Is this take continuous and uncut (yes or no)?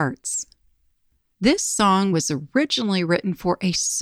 yes